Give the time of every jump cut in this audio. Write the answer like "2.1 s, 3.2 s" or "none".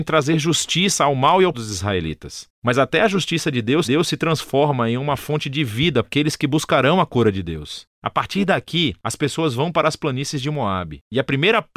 1.5 s, 3.8 s, 6.0 s